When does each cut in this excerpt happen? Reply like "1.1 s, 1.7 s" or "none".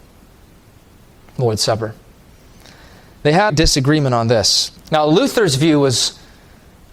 3.5 s, 4.8 s